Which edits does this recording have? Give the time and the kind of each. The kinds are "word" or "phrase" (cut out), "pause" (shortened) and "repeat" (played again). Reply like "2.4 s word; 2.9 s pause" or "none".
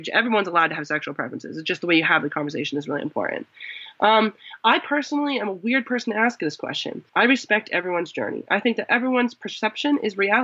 7.1 s pause